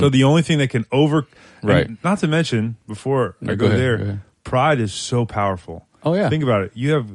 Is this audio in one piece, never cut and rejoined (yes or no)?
yes